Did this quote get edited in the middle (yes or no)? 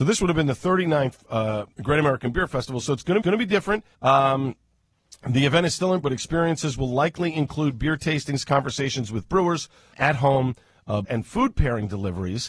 yes